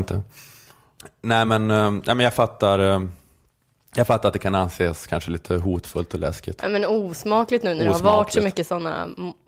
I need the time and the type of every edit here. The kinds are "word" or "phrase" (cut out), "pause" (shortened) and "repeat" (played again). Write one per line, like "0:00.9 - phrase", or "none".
none